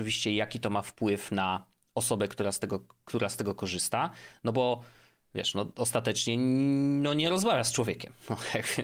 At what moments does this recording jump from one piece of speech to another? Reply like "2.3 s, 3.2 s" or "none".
none